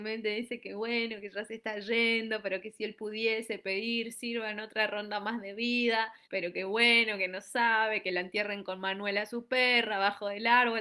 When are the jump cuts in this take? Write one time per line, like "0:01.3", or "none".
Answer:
0:06.2